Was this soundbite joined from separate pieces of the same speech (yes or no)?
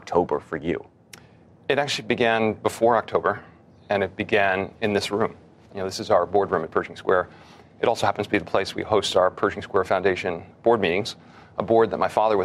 no